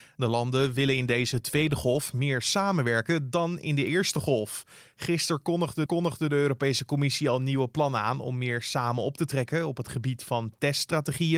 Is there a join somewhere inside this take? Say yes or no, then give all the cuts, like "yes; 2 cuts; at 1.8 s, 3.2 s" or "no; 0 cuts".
yes; 1 cut; at 5.9 s